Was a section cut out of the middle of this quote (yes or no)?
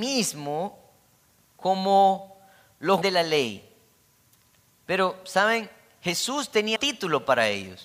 yes